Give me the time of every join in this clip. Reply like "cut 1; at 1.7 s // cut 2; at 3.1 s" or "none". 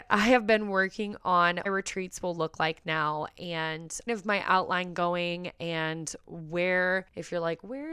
cut 1; at 1.7 s // cut 2; at 4.1 s